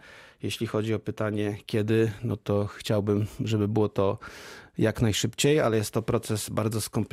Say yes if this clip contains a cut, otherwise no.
no